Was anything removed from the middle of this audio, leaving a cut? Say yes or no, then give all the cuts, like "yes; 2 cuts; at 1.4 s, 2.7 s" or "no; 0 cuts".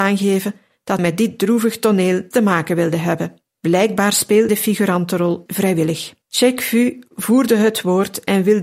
yes; 6 cuts; at 1.0 s, 2.3 s, 3.5 s, 4.5 s, 5.5 s, 6.2 s